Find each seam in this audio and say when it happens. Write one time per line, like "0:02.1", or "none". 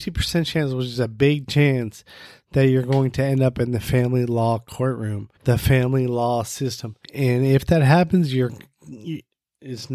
0:05.4
0:07.0